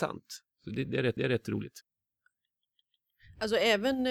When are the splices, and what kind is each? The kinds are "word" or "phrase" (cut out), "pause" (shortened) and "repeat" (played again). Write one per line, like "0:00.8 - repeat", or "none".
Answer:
0:01.2 - repeat